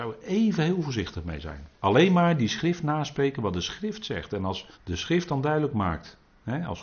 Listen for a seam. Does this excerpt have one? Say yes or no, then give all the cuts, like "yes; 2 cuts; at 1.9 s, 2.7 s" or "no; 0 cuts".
yes; 2 cuts; at 1.7 s, 4.7 s